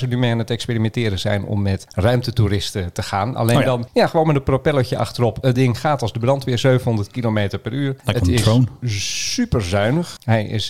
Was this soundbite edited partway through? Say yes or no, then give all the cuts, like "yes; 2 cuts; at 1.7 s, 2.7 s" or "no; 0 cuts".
no; 0 cuts